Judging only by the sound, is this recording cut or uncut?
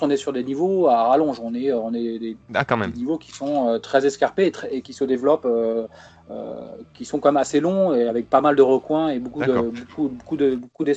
uncut